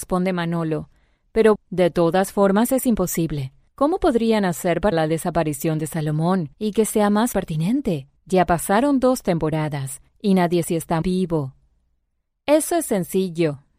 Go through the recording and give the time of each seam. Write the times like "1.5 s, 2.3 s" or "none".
1.6 s, 3.7 s, 4.9 s, 6.5 s, 7.3 s, 8.2 s, 10.1 s, 10.6 s, 11.0 s